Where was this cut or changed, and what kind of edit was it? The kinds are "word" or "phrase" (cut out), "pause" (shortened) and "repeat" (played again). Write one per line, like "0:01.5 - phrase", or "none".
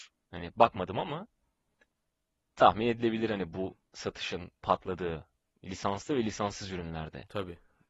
none